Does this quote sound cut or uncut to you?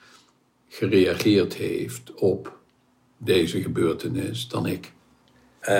uncut